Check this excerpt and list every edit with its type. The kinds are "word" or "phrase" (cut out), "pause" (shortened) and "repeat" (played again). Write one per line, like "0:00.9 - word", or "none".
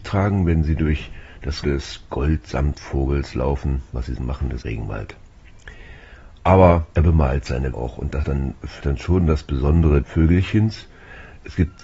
0:01.6 - word
0:04.2 - word
0:04.6 - word
0:06.9 - pause
0:07.7 - word
0:08.2 - word
0:08.8 - word
0:10.0 - word